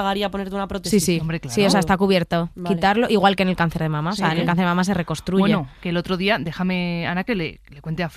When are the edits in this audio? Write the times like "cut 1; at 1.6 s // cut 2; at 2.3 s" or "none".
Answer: none